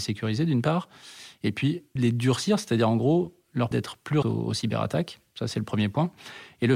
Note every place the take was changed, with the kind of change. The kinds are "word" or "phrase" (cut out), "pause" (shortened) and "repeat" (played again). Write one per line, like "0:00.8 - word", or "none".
0:02.0 - word
0:03.7 - word
0:04.2 - phrase

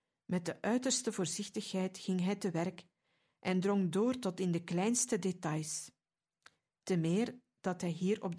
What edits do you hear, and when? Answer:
none

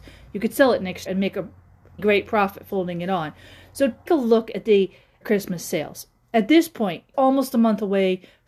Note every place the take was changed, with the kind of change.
0:01.1 - word
0:02.0 - word
0:02.7 - word
0:04.1 - word
0:05.2 - word
0:07.1 - word

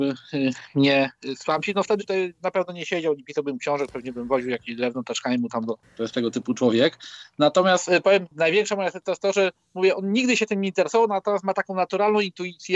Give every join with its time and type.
0:02.0 - word

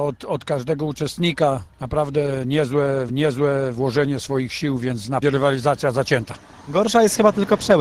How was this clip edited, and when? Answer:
0:01.7 - pause
0:03.1 - repeat
0:05.2 - phrase

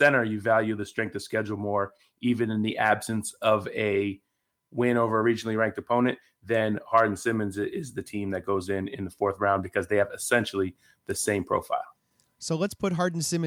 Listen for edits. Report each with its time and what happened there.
none

